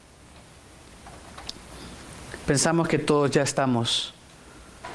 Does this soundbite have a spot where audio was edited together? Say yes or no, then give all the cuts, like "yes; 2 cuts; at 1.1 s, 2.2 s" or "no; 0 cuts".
no; 0 cuts